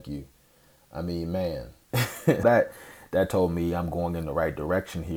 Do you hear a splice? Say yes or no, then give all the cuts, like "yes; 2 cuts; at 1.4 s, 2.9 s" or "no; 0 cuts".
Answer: yes; 1 cut; at 2.4 s